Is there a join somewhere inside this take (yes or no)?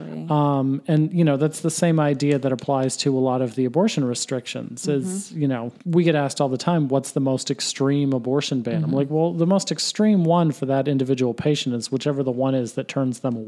yes